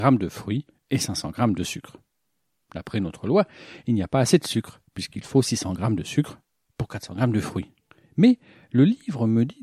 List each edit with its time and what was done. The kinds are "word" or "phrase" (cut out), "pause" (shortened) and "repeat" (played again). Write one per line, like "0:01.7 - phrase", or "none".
0:07.9 - pause